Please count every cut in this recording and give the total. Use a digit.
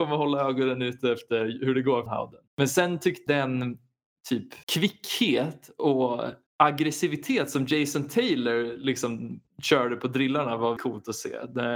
7